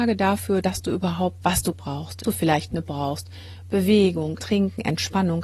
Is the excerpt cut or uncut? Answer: cut